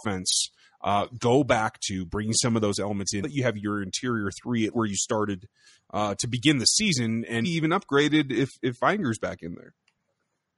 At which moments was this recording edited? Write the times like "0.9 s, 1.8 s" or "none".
3.2 s, 4.7 s, 7.4 s